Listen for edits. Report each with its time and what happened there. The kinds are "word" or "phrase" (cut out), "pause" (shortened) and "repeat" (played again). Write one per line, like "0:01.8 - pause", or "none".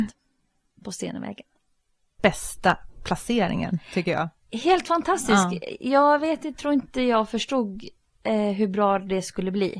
none